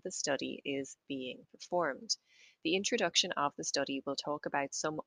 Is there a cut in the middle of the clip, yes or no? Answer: no